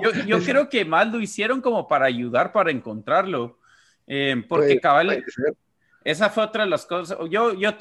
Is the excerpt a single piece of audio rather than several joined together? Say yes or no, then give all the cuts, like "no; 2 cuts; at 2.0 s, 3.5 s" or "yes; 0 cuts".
yes; 0 cuts